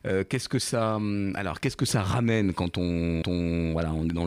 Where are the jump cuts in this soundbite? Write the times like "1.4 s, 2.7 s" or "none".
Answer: 3.2 s

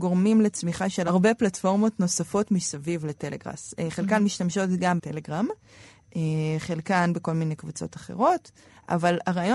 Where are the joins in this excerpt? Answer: 5.0 s

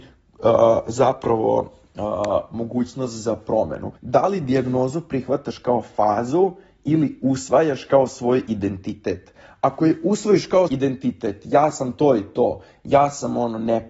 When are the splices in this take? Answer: 4.0 s, 10.7 s

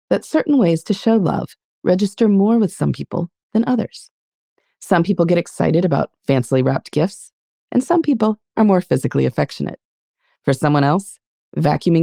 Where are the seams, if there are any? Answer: none

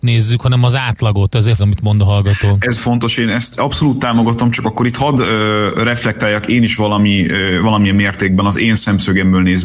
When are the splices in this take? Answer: 1.6 s, 2.8 s

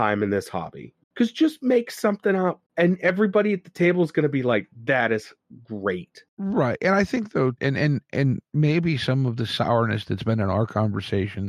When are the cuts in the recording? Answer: 1.0 s, 2.7 s, 6.3 s, 7.6 s

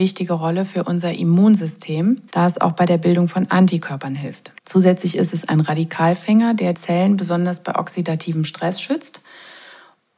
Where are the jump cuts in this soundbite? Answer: 2.3 s, 4.6 s, 6.7 s

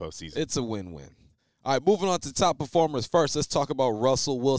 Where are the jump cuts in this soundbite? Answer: none

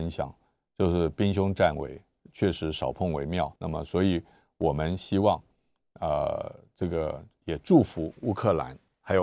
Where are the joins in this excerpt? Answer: 3.6 s

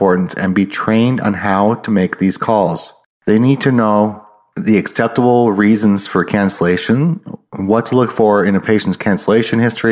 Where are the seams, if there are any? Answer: none

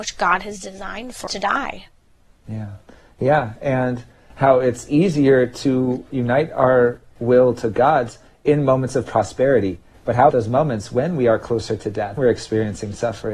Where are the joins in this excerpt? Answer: 1.3 s, 6.1 s, 10.3 s, 12.2 s

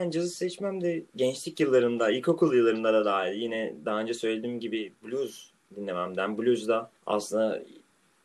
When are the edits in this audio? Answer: 1.1 s, 7.0 s

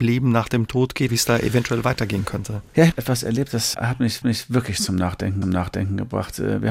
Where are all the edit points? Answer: 1.1 s, 2.9 s, 3.7 s, 4.2 s, 5.4 s

